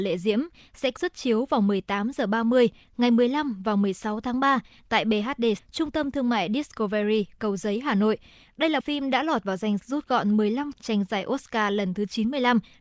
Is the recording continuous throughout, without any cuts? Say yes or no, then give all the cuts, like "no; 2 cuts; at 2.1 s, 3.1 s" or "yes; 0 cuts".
no; 6 cuts; at 1.0 s, 5.6 s, 7.4 s, 8.8 s, 9.8 s, 10.7 s